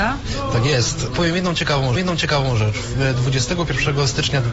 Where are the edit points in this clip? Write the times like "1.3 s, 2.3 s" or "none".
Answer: 2.0 s

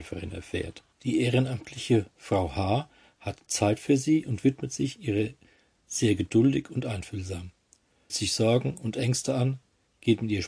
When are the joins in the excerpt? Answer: 0.9 s, 8.1 s

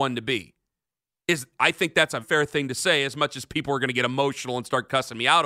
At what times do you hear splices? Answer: 2.2 s

